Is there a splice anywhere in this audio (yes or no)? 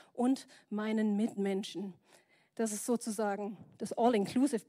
no